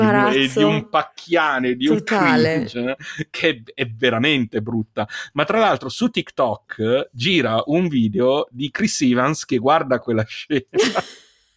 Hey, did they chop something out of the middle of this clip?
no; 0 cuts

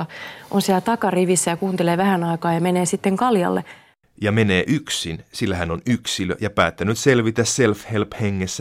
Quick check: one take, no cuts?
yes; 0 cuts

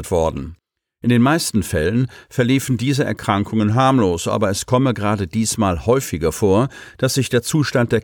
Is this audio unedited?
yes; 0 cuts

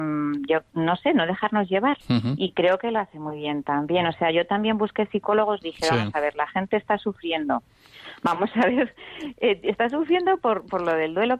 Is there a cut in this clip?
yes; 1 cut; at 2.0 s

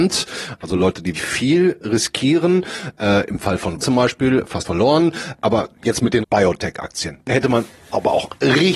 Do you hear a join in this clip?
yes; 4 cuts; at 1.1 s, 3.8 s, 4.6 s, 6.2 s

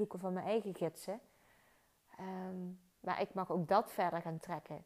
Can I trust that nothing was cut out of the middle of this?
yes; 0 cuts

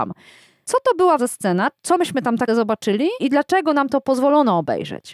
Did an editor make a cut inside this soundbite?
yes; 3 cuts; at 1.2 s, 2.5 s, 3.2 s

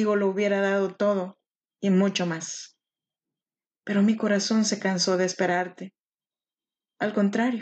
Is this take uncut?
yes; 0 cuts

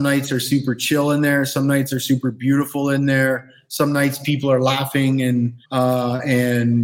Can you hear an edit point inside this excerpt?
yes; 1 cut; at 5.6 s

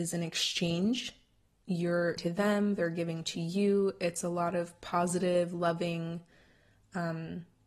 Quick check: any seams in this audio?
yes; 1 cut; at 2.2 s

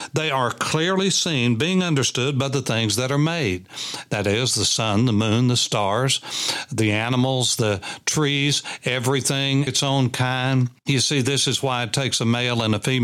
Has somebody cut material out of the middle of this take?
yes; 2 cuts; at 9.7 s, 10.8 s

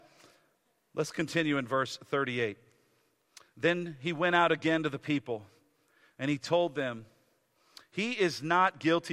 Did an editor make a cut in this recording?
no; 0 cuts

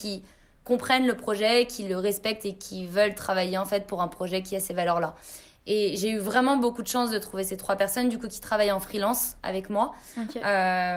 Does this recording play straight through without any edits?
yes; 0 cuts

